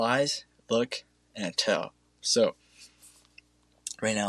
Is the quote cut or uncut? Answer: uncut